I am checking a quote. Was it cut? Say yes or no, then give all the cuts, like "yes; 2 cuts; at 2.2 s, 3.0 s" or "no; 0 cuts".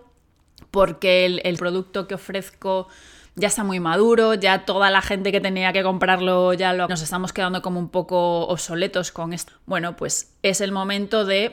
yes; 3 cuts; at 1.6 s, 6.9 s, 9.5 s